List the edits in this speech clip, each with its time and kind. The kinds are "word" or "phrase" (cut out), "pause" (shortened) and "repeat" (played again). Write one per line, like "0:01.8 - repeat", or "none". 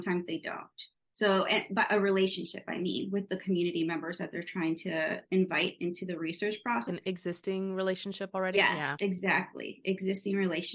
0:06.9 - word